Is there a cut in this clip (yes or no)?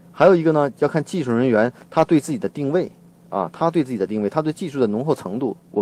no